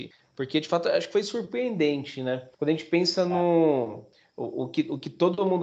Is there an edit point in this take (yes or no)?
yes